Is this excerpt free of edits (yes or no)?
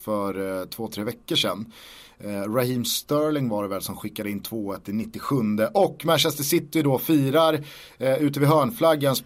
yes